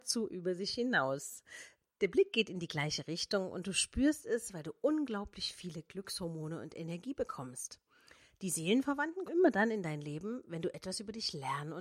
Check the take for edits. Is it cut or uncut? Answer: cut